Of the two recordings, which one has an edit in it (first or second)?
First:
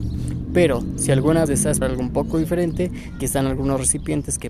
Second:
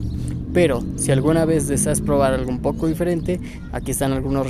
first